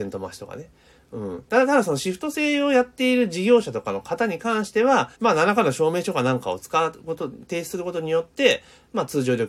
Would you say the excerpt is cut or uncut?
cut